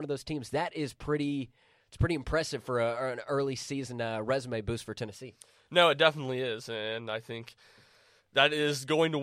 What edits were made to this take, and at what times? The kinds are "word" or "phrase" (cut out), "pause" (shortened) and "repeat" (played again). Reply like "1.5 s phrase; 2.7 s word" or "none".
none

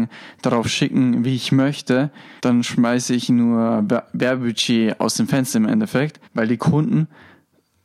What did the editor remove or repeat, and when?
2.4 s pause; 6.2 s pause

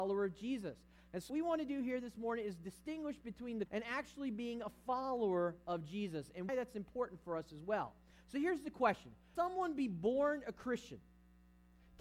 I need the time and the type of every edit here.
1.3 s word; 3.7 s word; 6.5 s word; 9.4 s word

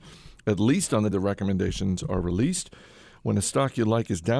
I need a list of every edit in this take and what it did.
1.1 s word

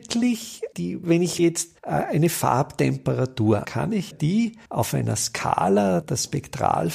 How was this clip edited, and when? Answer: 1.0 s word; 1.4 s word; 1.8 s pause; 3.6 s phrase; 4.1 s word; 4.7 s pause; 6.0 s word

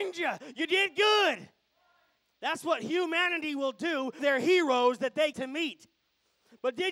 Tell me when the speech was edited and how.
4.2 s word; 5.3 s word

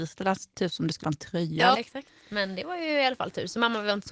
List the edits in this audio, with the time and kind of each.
1.0 s word; 1.7 s word

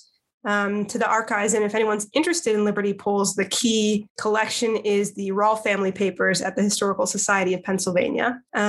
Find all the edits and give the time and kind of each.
none

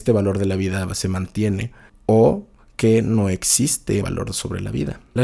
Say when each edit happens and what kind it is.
1.9 s pause; 4.0 s word

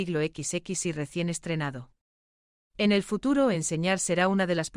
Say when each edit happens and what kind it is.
none

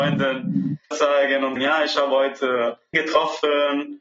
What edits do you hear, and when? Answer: 0.9 s word; 1.6 s word; 2.9 s word

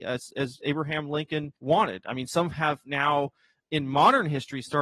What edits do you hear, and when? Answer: 1.6 s pause

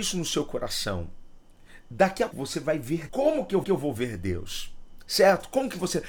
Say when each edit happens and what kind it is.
2.3 s word; 3.1 s word; 3.6 s repeat

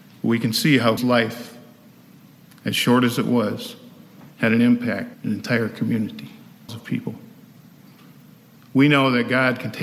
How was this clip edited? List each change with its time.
1.0 s word; 4.3 s pause; 5.1 s word; 6.7 s word

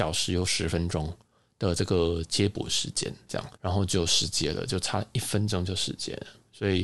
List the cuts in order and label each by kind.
3.5 s pause

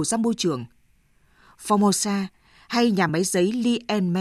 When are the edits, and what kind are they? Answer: none

